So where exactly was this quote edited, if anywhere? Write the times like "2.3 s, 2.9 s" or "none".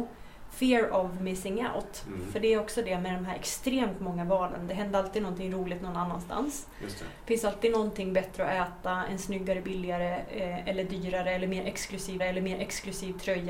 12.2 s